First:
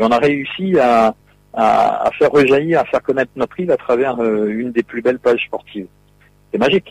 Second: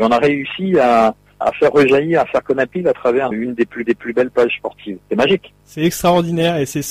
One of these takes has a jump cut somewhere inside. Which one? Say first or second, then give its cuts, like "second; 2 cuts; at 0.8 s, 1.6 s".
second; 6 cuts; at 1.4 s, 2.7 s, 3.3 s, 3.9 s, 5.0 s, 5.6 s